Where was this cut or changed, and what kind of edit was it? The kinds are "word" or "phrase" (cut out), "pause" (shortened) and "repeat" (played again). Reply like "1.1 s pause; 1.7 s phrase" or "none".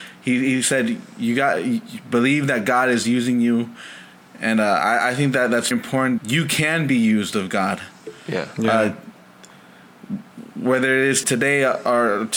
5.7 s word; 6.2 s word; 11.2 s word